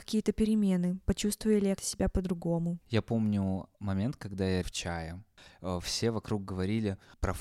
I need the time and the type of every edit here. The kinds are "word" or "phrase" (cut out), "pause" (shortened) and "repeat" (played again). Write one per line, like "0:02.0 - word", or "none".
0:01.8 - word
0:02.8 - pause
0:03.7 - pause
0:04.6 - phrase